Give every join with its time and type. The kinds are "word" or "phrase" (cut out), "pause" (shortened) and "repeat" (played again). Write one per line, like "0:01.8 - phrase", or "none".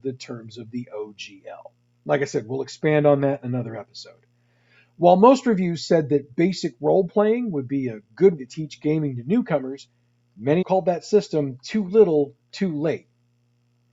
0:08.4 - word
0:10.6 - word